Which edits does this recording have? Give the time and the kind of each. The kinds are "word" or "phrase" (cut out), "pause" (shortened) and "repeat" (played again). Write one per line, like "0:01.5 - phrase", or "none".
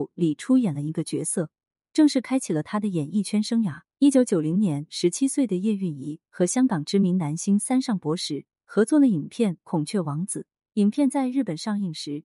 0:03.9 - pause